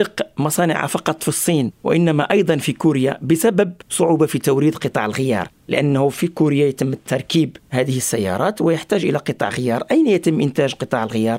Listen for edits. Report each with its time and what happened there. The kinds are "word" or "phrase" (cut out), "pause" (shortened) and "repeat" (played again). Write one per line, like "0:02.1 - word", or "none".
none